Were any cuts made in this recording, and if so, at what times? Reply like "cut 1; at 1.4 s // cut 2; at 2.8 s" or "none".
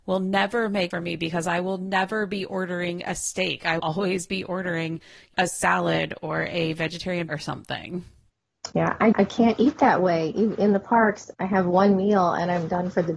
cut 1; at 0.9 s // cut 2; at 3.8 s // cut 3; at 5.3 s // cut 4; at 7.3 s // cut 5; at 9.1 s // cut 6; at 11.3 s